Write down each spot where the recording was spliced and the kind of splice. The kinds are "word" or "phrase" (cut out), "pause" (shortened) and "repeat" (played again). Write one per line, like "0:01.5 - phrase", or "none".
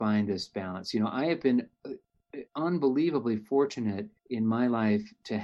0:02.5 - pause
0:04.2 - pause